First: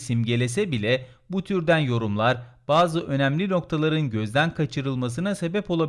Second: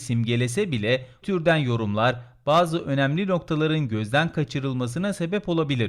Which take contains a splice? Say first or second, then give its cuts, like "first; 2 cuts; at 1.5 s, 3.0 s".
second; 1 cut; at 1.2 s